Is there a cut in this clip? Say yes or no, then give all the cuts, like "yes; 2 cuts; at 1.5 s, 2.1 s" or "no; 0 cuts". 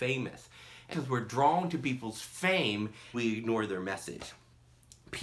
yes; 2 cuts; at 0.9 s, 3.1 s